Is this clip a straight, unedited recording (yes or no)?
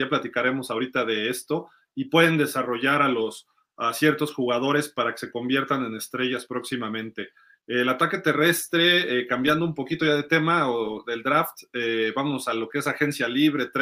yes